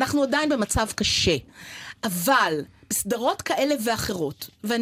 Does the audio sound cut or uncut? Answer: uncut